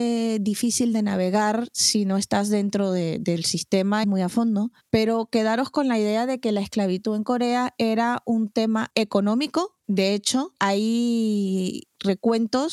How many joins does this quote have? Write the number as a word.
one